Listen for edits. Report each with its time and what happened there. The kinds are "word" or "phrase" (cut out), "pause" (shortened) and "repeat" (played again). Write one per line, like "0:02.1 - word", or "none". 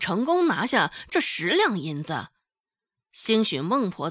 none

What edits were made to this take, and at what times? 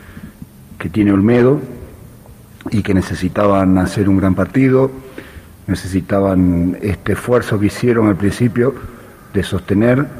none

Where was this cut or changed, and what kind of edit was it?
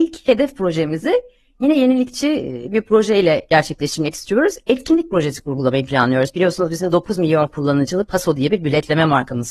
none

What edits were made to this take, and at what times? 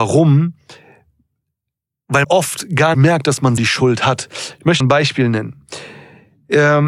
0:02.2 - word
0:02.9 - word
0:03.6 - word
0:04.8 - word

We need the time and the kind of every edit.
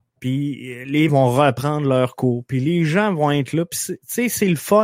0:01.1 - phrase

